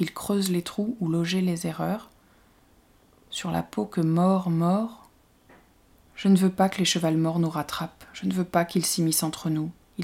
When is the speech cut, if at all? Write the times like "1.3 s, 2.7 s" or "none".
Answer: none